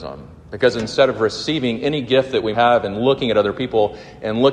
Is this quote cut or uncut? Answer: cut